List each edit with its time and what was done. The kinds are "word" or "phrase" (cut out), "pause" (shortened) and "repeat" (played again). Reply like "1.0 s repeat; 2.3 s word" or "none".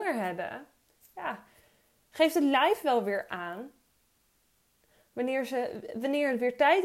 none